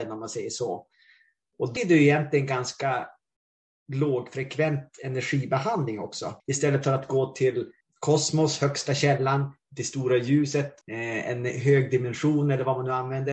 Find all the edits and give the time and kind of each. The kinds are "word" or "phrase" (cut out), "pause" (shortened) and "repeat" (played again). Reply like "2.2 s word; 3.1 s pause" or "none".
1.8 s word; 6.4 s pause; 7.8 s word; 10.8 s pause